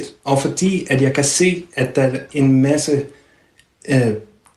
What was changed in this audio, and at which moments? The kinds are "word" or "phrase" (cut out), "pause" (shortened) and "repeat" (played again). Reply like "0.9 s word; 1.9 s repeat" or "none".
2.3 s word